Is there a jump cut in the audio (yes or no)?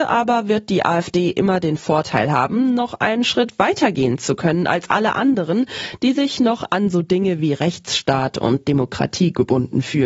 no